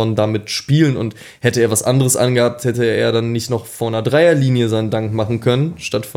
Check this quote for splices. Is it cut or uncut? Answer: uncut